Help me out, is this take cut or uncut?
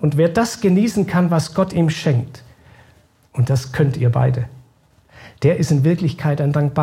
uncut